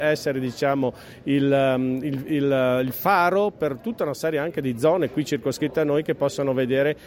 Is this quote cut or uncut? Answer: uncut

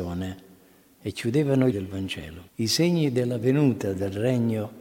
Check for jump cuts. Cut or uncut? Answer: cut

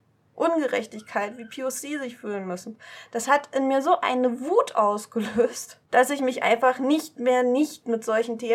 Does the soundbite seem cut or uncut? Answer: cut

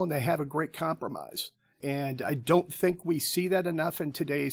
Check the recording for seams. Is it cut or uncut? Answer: cut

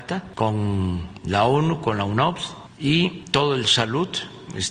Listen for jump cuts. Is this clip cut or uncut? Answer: cut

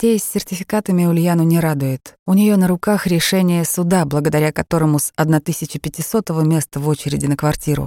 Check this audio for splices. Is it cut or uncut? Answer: cut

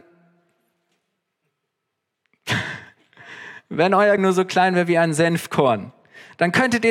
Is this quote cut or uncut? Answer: cut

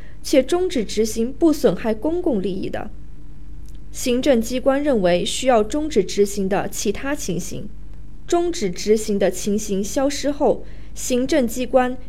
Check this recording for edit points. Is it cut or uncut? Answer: cut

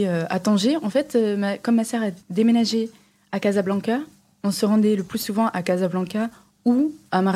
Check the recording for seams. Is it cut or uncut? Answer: cut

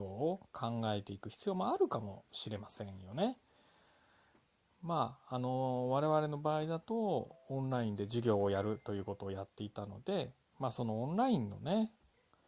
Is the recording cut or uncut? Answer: uncut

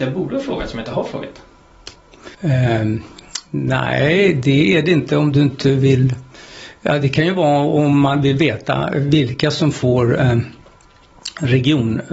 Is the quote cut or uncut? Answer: cut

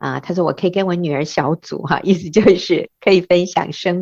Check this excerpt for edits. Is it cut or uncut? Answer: uncut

